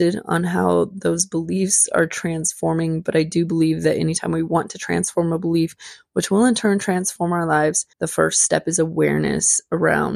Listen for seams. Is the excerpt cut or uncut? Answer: cut